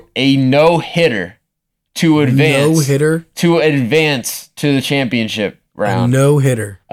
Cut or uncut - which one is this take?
uncut